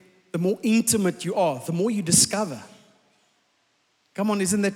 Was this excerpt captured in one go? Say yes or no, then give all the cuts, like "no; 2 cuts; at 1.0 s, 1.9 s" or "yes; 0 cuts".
yes; 0 cuts